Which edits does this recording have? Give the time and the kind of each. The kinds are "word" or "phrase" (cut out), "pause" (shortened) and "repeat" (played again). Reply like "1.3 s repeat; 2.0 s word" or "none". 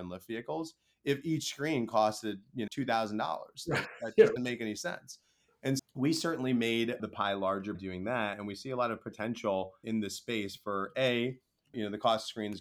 2.7 s word; 4.4 s word; 5.8 s word; 7.0 s word; 7.7 s word; 9.8 s word